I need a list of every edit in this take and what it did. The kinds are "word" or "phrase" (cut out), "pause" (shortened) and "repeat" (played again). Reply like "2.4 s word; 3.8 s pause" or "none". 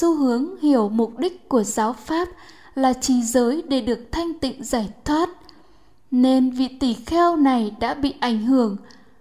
none